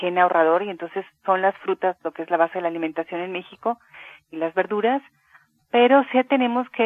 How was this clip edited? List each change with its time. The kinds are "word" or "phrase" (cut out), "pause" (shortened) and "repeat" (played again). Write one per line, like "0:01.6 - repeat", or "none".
none